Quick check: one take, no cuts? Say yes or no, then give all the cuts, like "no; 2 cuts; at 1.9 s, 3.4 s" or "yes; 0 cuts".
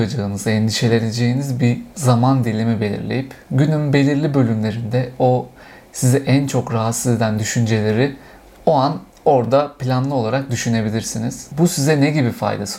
yes; 0 cuts